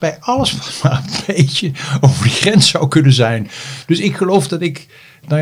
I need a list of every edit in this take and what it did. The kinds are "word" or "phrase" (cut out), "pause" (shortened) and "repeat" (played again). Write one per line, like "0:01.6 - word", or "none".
none